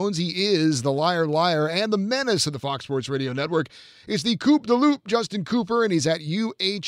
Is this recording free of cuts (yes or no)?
yes